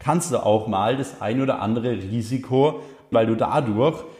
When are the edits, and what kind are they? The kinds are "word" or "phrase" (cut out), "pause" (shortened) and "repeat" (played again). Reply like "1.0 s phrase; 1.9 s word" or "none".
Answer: 3.1 s word